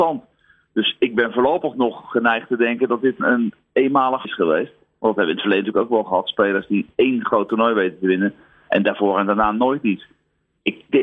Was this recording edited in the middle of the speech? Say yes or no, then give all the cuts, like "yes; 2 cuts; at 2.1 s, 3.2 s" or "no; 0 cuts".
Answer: yes; 2 cuts; at 3.2 s, 4.2 s